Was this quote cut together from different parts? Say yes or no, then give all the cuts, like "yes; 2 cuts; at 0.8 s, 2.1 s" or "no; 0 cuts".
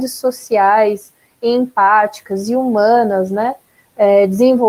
no; 0 cuts